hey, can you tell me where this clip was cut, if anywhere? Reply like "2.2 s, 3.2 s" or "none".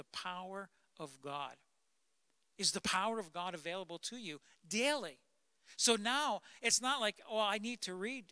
none